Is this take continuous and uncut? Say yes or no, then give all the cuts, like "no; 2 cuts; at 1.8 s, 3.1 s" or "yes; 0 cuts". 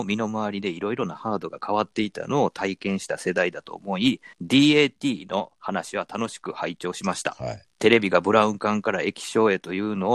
no; 2 cuts; at 4.3 s, 7.7 s